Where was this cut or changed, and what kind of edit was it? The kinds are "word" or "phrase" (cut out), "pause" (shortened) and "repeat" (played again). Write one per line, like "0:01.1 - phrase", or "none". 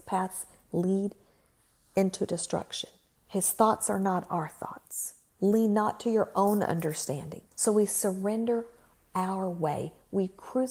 0:03.2 - pause
0:05.3 - pause
0:07.5 - pause